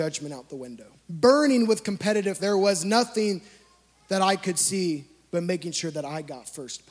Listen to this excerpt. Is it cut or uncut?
cut